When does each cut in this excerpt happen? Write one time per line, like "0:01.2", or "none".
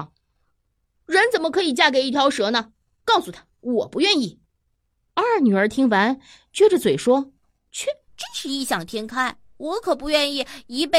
0:04.5